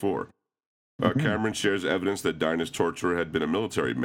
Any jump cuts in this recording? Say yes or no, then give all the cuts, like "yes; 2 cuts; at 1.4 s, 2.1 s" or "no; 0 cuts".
no; 0 cuts